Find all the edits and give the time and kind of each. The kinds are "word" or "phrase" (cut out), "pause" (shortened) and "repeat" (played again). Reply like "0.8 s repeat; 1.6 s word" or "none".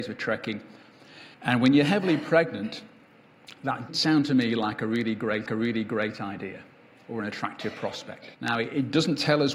1.3 s pause; 3.9 s word; 5.5 s repeat; 8.3 s pause